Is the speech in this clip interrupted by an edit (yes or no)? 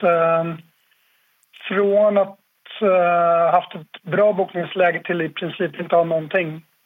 no